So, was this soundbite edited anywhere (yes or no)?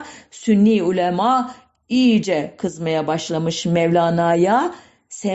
no